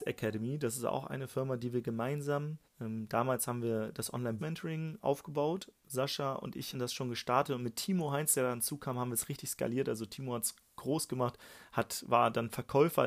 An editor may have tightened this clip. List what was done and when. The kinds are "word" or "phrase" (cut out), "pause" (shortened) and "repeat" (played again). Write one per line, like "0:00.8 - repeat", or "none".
0:02.6 - pause
0:04.4 - word
0:05.8 - pause
0:06.7 - word